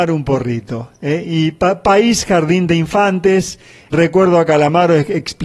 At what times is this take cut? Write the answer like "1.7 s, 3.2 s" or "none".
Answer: 3.9 s